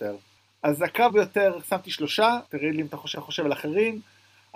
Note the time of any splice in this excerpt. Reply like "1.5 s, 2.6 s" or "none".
1.1 s, 2.5 s, 3.1 s